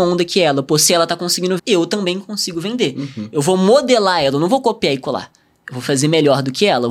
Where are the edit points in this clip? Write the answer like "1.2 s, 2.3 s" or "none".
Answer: 1.6 s